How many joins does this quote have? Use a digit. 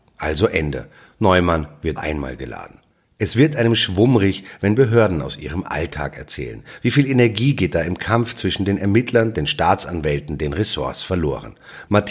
1